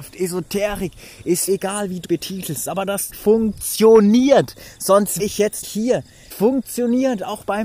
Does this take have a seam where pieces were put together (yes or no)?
yes